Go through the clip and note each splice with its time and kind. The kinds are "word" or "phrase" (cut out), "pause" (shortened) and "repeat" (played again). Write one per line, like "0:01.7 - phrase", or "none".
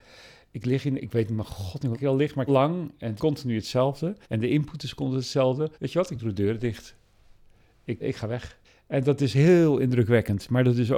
0:01.9 - word
0:02.5 - phrase
0:03.2 - word
0:04.2 - pause
0:05.7 - pause
0:08.0 - word
0:08.6 - pause